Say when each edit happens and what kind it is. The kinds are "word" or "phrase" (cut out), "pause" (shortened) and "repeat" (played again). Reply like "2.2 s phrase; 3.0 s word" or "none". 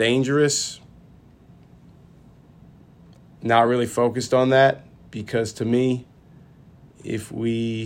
none